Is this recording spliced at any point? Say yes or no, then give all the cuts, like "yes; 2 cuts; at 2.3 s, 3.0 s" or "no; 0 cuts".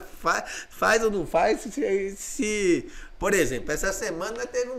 no; 0 cuts